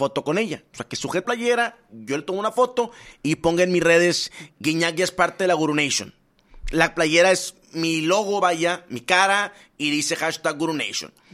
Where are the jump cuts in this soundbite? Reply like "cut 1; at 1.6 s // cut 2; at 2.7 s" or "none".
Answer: cut 1; at 1.2 s